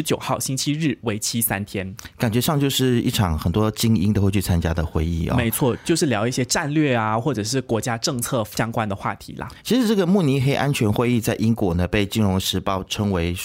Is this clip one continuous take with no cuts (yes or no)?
no